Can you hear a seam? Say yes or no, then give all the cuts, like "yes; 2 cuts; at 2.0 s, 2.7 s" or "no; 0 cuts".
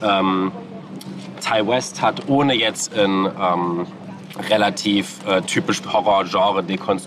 yes; 2 cuts; at 1.4 s, 5.8 s